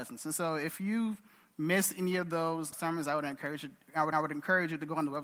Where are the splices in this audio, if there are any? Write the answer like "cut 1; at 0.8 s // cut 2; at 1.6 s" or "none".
cut 1; at 2.7 s // cut 2; at 4.1 s